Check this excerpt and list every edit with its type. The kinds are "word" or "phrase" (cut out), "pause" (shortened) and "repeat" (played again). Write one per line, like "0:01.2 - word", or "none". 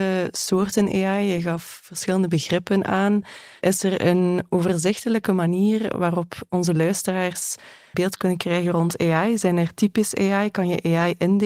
0:07.9 - phrase